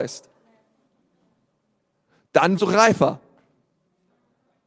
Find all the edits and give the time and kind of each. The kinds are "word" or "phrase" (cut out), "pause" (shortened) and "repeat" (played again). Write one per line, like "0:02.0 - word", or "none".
0:02.6 - word